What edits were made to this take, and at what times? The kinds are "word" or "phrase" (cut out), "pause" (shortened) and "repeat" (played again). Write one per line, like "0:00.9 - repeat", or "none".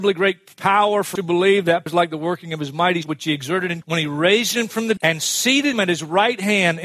0:01.2 - word
0:01.9 - word
0:03.0 - word
0:03.8 - word
0:05.0 - word
0:05.7 - word

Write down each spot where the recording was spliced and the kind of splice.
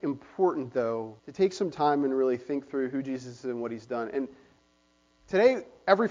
0:01.2 - pause

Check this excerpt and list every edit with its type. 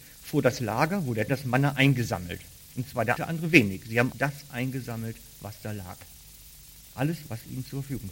0:01.3 - phrase
0:03.2 - phrase
0:04.1 - word

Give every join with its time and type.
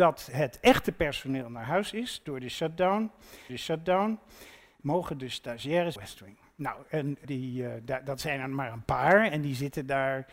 0:03.5 - repeat
0:06.0 - phrase
0:07.2 - word

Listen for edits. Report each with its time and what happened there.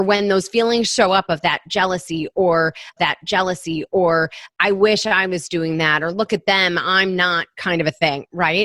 0:03.0 - repeat

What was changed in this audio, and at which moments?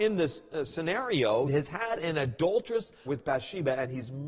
0:01.5 - word
0:03.1 - word

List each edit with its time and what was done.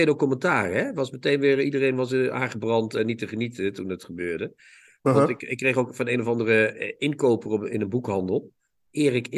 none

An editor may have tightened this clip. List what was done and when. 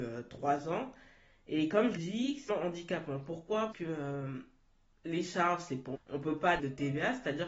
0:02.0 - word
0:02.5 - word
0:03.7 - word
0:05.9 - word
0:06.6 - word

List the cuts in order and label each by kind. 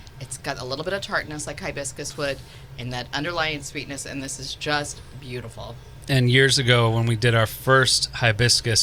none

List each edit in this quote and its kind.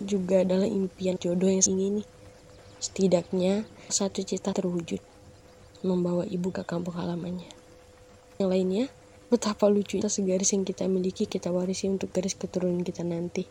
0:01.2 - word
0:01.7 - word
0:03.9 - word
0:04.5 - word
0:06.5 - word
0:08.4 - word
0:09.2 - word
0:10.0 - word
0:11.3 - word

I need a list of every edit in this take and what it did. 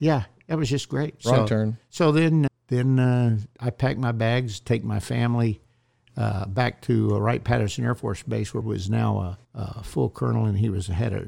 0:02.5 - word
0:08.6 - phrase
0:09.4 - pause

